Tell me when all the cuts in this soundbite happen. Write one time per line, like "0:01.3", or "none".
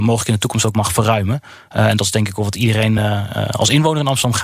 none